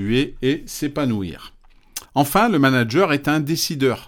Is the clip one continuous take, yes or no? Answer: no